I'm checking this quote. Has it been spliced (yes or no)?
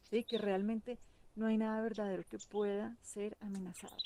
no